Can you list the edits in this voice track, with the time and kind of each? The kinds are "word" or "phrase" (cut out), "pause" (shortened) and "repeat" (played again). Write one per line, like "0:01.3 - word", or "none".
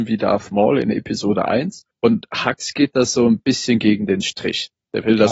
0:01.9 - pause